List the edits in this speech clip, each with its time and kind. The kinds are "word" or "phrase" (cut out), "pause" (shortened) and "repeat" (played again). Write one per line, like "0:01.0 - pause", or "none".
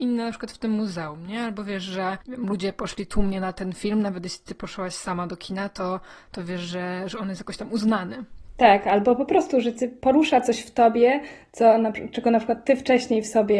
0:02.2 - pause